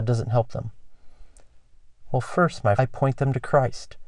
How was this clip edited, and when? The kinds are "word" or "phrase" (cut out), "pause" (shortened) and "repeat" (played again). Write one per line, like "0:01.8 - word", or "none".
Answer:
0:02.8 - word